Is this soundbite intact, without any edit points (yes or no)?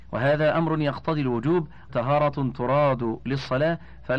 no